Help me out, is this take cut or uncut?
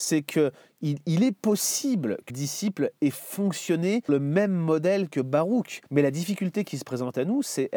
cut